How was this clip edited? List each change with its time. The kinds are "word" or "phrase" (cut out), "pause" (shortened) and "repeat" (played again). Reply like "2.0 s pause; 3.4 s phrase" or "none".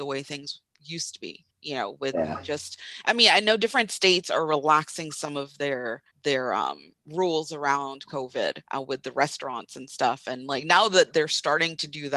1.5 s pause; 6.1 s pause; 8.6 s pause